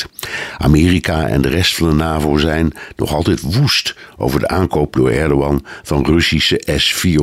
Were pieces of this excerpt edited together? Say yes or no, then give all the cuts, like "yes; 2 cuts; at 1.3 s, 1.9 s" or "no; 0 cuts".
no; 0 cuts